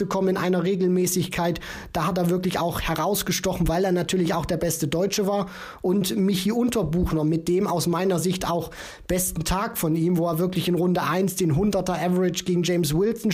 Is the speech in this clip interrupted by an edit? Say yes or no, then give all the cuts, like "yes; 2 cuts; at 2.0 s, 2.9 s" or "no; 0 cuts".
no; 0 cuts